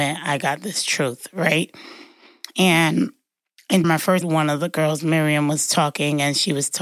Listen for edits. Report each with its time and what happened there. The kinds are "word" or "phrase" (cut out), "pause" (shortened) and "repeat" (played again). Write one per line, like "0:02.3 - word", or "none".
0:03.8 - word
0:04.2 - word